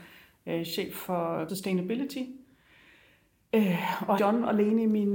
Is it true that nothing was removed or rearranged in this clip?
no; 2 cuts; at 1.5 s, 4.2 s

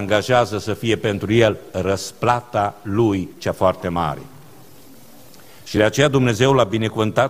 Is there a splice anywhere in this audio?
no; 0 cuts

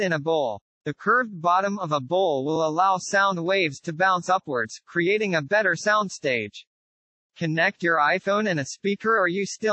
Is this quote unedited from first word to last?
yes; 0 cuts

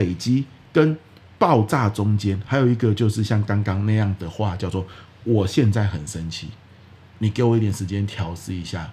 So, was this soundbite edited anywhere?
no; 0 cuts

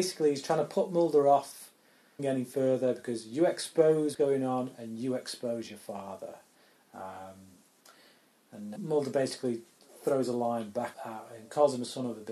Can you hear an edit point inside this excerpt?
yes; 4 cuts; at 2.2 s, 4.1 s, 8.8 s, 10.9 s

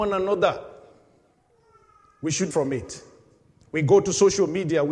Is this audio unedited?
no; 1 cut; at 2.5 s

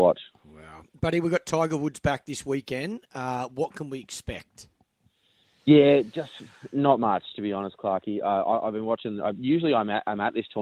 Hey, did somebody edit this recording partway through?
no; 0 cuts

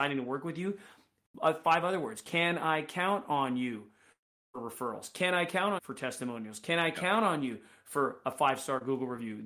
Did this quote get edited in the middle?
yes; 1 cut; at 5.8 s

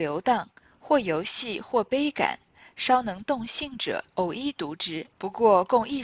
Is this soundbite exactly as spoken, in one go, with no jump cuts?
no; 2 cuts; at 4.1 s, 5.1 s

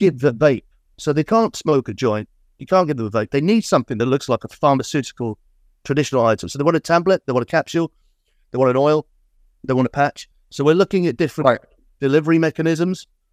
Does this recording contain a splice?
no; 0 cuts

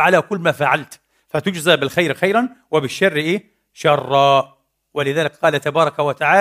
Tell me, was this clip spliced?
no; 0 cuts

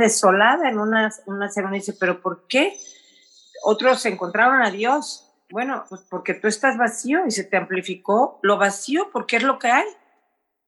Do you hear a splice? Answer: yes; 1 cut; at 5.9 s

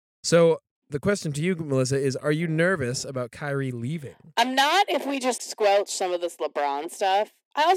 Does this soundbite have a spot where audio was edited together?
yes; 1 cut; at 5.4 s

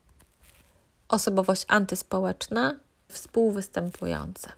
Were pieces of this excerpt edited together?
yes; 1 cut; at 3.1 s

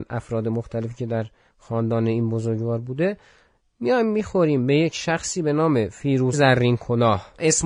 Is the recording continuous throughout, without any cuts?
no; 1 cut; at 6.3 s

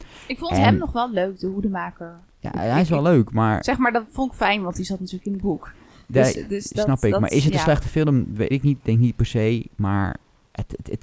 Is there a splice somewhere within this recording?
yes; 1 cut; at 8.5 s

